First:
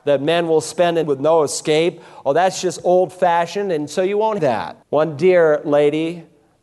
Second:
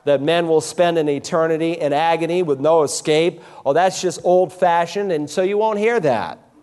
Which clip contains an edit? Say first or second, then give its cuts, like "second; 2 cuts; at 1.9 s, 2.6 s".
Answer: first; 3 cuts; at 1.0 s, 4.4 s, 4.8 s